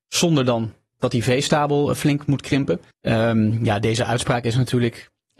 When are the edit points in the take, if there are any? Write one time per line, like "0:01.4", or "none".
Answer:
0:02.9